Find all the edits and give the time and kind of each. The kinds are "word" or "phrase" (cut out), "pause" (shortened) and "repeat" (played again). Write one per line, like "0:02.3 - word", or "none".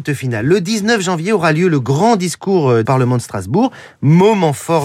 0:02.8 - phrase